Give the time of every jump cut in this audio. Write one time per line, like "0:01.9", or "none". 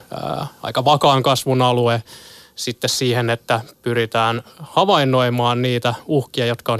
none